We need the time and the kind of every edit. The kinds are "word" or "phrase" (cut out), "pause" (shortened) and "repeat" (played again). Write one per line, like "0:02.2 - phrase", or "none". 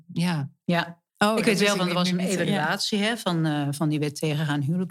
0:01.1 - pause